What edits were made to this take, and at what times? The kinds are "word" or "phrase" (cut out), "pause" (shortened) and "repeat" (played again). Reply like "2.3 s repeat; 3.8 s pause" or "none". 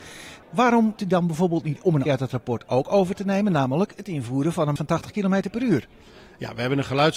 1.0 s word; 2.1 s phrase; 4.8 s word